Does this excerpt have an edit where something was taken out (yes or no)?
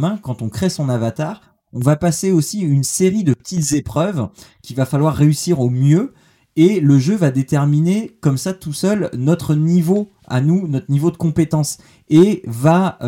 no